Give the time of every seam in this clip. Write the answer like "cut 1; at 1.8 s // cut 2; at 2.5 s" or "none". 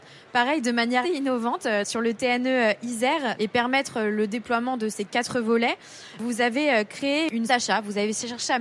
cut 1; at 1.0 s // cut 2; at 3.4 s // cut 3; at 7.5 s